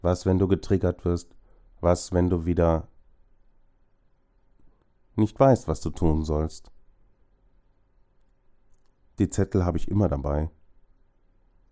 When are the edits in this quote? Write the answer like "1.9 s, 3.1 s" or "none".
none